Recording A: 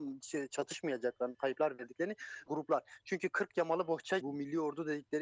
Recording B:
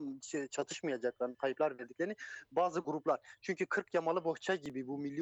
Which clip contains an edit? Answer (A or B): A